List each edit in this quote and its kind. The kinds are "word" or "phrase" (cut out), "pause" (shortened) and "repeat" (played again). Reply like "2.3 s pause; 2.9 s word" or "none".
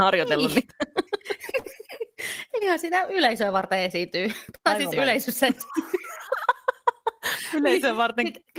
none